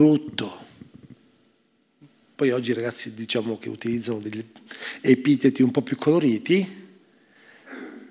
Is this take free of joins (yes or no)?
yes